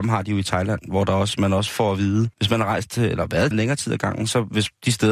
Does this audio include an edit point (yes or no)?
yes